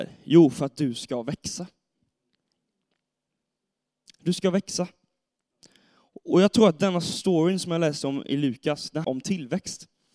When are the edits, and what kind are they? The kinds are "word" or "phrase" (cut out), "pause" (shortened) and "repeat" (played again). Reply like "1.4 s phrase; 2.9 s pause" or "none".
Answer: 9.0 s word